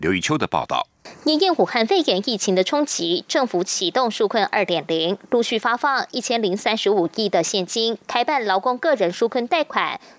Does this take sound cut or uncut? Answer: uncut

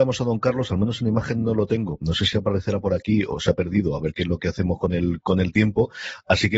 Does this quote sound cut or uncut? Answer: uncut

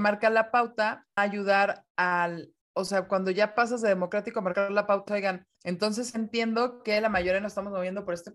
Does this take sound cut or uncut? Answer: cut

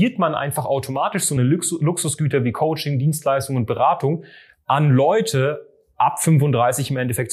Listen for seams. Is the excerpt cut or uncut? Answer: uncut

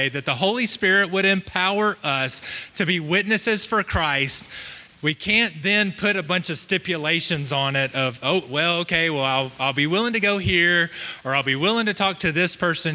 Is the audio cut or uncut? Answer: uncut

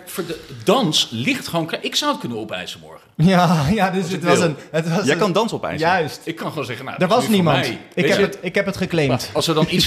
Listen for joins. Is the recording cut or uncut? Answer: uncut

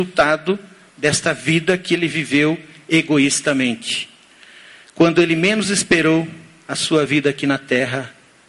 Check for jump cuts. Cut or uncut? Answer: uncut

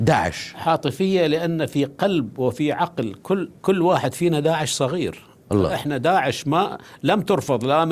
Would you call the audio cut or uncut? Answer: cut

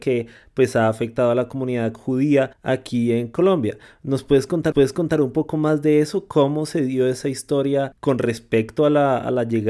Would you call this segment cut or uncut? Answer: cut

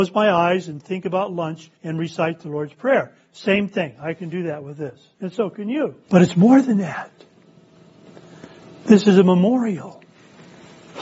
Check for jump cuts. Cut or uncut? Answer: cut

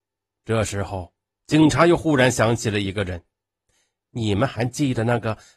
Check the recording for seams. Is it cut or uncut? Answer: uncut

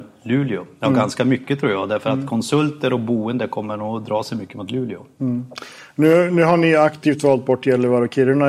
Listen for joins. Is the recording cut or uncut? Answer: uncut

